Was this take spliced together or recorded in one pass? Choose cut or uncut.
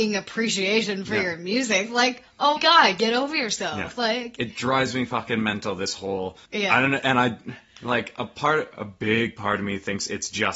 cut